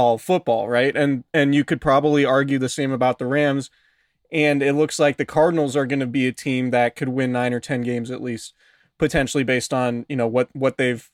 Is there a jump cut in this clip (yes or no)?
no